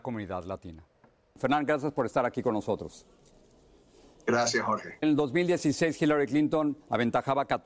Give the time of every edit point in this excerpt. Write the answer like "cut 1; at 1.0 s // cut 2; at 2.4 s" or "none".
cut 1; at 5.0 s